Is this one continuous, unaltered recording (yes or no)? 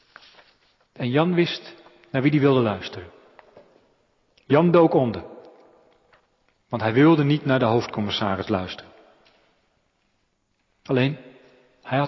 yes